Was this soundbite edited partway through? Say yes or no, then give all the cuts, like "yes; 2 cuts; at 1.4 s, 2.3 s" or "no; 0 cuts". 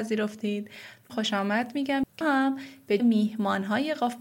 yes; 3 cuts; at 1.1 s, 2.2 s, 3.0 s